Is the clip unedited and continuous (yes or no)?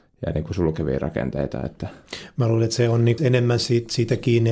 no